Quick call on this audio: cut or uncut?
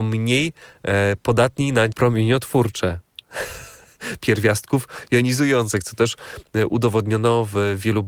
cut